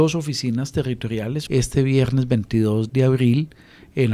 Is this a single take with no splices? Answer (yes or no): no